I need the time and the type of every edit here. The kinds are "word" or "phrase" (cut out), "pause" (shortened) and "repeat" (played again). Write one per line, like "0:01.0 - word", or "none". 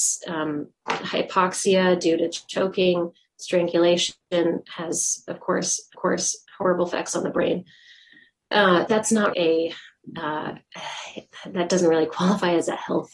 0:05.9 - repeat
0:08.9 - word
0:09.3 - word